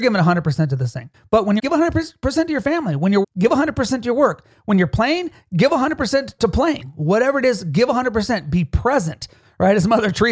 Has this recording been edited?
yes; 4 cuts; at 1.1 s, 1.6 s, 3.2 s, 6.4 s

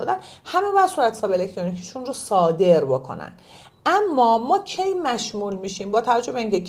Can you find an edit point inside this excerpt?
no; 0 cuts

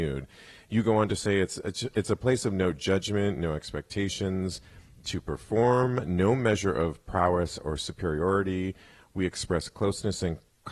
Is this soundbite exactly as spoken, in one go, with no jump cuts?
yes; 0 cuts

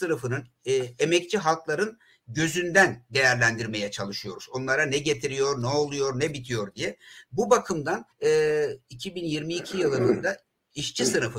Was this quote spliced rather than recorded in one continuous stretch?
yes; 1 cut; at 8.1 s

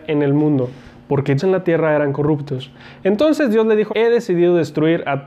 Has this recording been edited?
yes; 2 cuts; at 1.4 s, 3.9 s

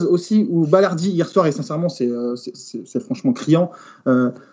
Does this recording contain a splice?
no; 0 cuts

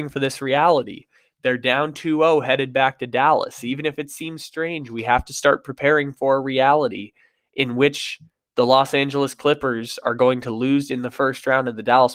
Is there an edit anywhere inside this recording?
no; 0 cuts

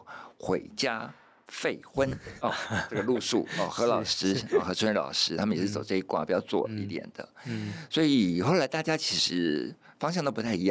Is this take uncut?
yes; 0 cuts

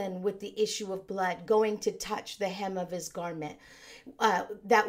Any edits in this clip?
no; 0 cuts

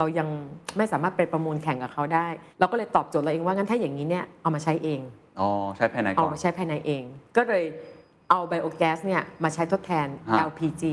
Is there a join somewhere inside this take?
yes; 1 cut; at 2.5 s

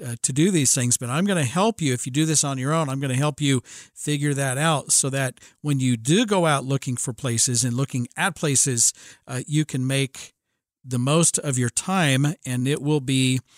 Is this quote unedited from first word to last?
yes; 0 cuts

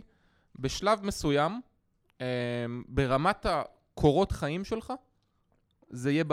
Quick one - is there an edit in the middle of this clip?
no; 0 cuts

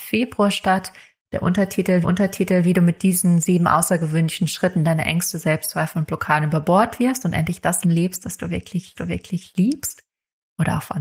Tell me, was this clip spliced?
yes; 3 cuts; at 2.0 s, 7.8 s, 8.9 s

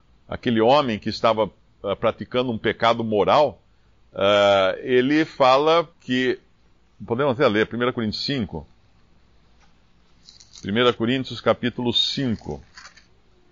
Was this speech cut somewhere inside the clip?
yes; 1 cut; at 5.9 s

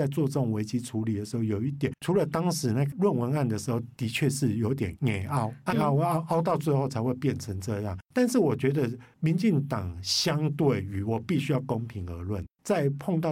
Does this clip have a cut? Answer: yes; 1 cut; at 5.7 s

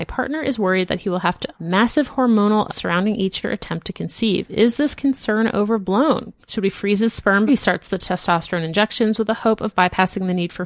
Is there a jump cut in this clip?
yes; 5 cuts; at 1.5 s, 2.7 s, 3.4 s, 6.4 s, 7.5 s

